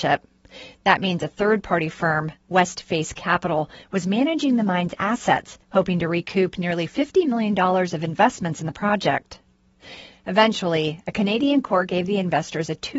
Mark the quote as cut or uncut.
cut